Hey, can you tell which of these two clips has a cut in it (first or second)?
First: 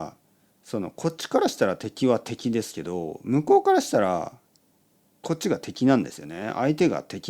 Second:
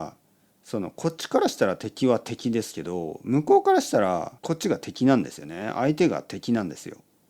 second